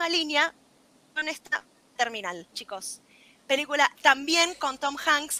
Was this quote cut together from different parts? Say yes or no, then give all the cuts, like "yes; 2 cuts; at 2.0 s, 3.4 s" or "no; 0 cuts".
yes; 2 cuts; at 2.0 s, 3.9 s